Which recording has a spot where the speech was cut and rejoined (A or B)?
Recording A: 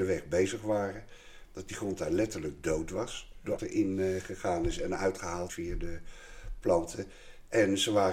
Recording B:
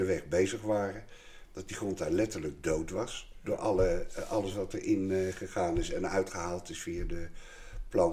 A